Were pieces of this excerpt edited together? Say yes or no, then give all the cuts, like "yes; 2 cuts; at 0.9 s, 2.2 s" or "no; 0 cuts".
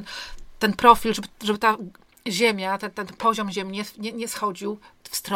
no; 0 cuts